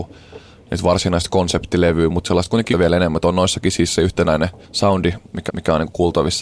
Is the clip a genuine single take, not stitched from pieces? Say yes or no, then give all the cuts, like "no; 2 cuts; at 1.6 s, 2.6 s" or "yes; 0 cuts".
no; 3 cuts; at 2.7 s, 4.6 s, 5.5 s